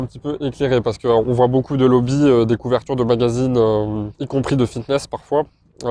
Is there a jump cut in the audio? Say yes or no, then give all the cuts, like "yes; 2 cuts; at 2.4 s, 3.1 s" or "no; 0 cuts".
yes; 1 cut; at 4.1 s